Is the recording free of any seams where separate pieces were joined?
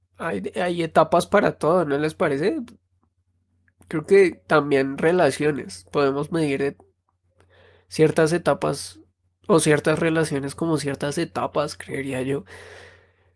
yes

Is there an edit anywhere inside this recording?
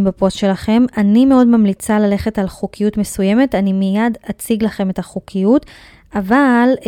no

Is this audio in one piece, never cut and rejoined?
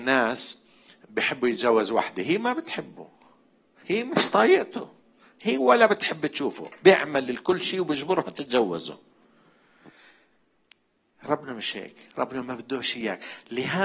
yes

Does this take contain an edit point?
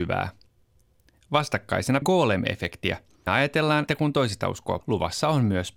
yes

